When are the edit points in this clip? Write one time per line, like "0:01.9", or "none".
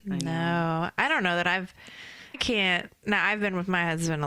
0:02.3